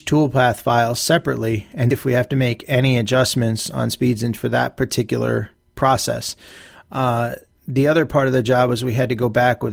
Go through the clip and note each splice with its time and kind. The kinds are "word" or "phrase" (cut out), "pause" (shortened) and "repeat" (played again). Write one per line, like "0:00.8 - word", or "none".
0:01.9 - word
0:04.4 - word
0:07.5 - word